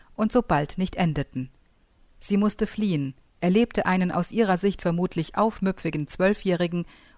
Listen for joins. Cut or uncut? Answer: uncut